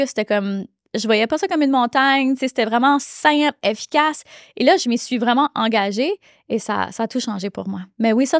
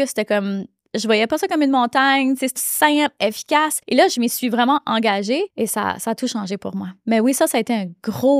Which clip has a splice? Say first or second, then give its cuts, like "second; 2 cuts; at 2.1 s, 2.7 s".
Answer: second; 3 cuts; at 2.6 s, 3.8 s, 5.5 s